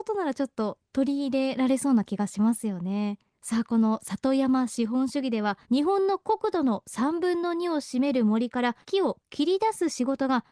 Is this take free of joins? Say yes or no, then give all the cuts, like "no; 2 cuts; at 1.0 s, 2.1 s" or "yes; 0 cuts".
no; 3 cuts; at 3.3 s, 5.6 s, 8.8 s